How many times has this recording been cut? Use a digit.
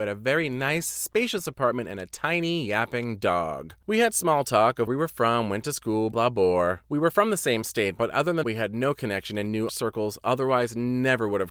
4